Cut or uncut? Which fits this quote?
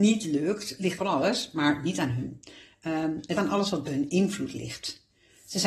cut